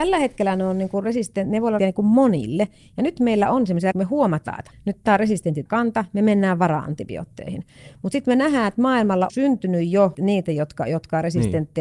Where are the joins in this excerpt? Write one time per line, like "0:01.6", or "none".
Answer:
0:01.8
0:03.9
0:04.7
0:05.7
0:09.3
0:10.1